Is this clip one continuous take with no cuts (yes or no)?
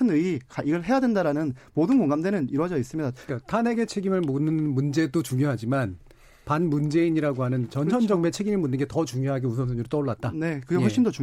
yes